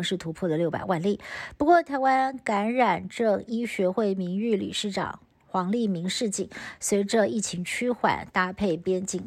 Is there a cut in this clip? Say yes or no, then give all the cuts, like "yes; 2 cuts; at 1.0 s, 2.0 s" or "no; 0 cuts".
no; 0 cuts